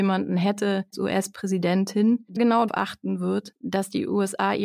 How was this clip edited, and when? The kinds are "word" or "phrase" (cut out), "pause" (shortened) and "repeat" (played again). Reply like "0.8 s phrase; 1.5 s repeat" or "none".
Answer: 0.9 s word; 2.4 s word; 2.7 s word

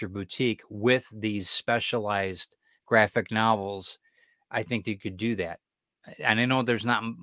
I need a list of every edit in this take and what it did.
none

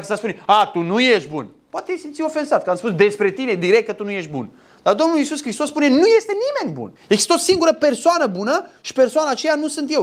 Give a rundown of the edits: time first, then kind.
7.0 s pause

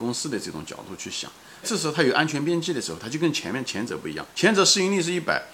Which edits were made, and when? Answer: 1.6 s phrase; 4.3 s pause

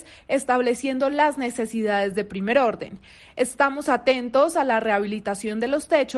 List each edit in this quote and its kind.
none

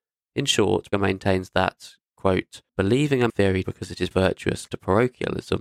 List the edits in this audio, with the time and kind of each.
0.9 s word; 2.7 s pause; 3.3 s word; 3.6 s word; 4.1 s word; 4.7 s word

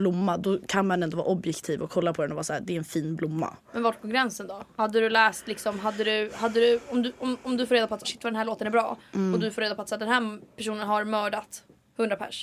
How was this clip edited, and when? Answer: 8.0 s word

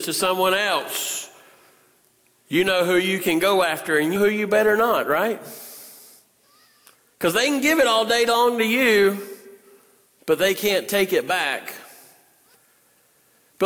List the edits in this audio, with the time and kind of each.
4.2 s word

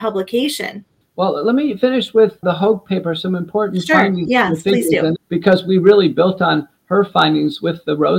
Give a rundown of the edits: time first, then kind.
1.0 s pause; 2.4 s word; 5.2 s word

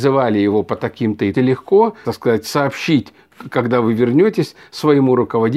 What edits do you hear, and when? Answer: 1.3 s phrase; 2.0 s word

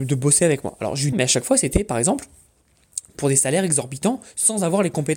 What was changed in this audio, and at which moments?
1.1 s phrase

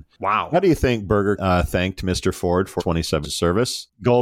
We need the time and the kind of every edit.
1.4 s word; 2.8 s word; 3.2 s word

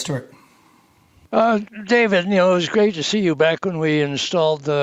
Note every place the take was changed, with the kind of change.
none

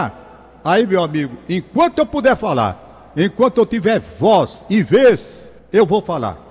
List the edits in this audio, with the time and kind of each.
5.6 s pause

